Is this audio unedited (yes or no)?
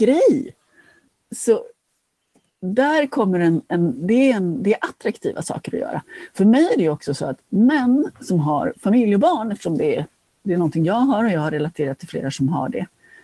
yes